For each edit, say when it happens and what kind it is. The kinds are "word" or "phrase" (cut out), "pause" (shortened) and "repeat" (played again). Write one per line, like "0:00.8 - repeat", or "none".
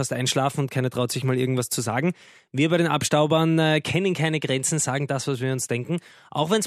none

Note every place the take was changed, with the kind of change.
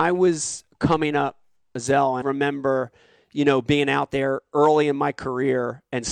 0:02.2 - phrase

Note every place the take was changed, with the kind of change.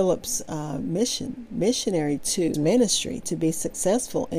0:02.2 - word
0:02.5 - word

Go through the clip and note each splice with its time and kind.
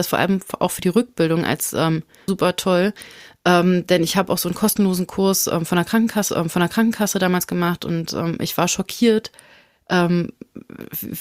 0:02.3 - word
0:06.3 - repeat

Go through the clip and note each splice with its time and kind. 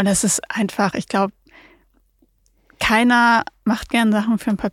none

